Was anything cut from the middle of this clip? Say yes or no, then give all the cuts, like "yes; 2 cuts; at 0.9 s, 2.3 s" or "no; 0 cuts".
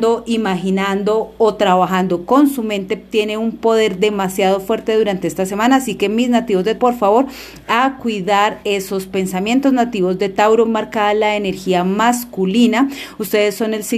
yes; 2 cuts; at 6.8 s, 10.7 s